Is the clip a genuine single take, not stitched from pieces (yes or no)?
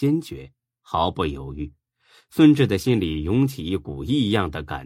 yes